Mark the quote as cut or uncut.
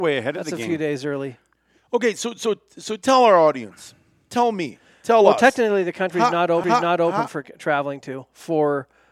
cut